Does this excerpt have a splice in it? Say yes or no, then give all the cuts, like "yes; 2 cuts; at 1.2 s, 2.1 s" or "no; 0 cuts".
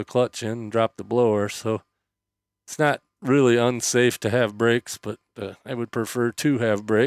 no; 0 cuts